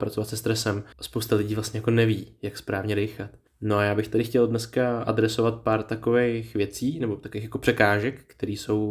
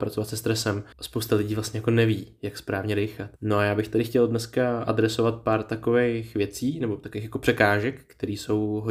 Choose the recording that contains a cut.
second; 1 cut; at 3.4 s

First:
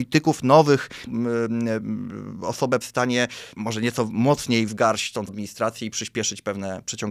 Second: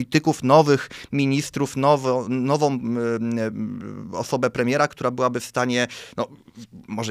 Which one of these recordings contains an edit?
first; 5 cuts; at 1.1 s, 2.8 s, 3.5 s, 4.7 s, 5.3 s

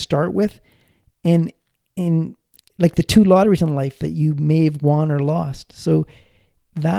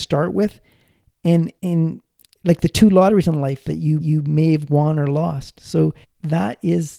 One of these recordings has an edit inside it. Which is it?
second; 3 cuts; at 1.6 s, 4.0 s, 6.0 s

